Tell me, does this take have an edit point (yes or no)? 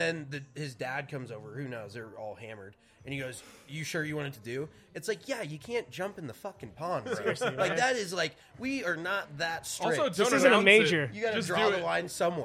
yes